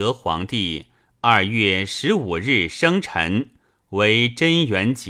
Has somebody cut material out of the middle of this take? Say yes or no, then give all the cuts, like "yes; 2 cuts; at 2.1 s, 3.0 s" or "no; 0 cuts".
no; 0 cuts